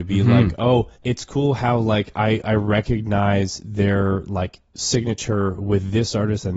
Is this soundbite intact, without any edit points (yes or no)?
no